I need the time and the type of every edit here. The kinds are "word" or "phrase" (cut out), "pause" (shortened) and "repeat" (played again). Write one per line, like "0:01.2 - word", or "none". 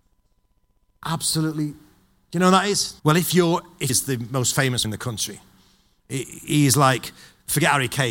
0:03.0 - pause
0:03.9 - phrase
0:04.8 - word